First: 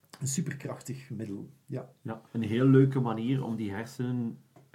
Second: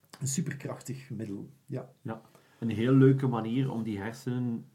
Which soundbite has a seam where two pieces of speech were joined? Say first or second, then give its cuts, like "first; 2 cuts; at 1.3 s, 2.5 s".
first; 1 cut; at 2.3 s